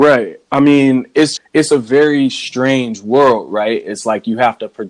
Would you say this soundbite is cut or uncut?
cut